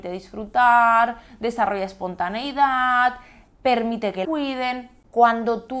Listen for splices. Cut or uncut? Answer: cut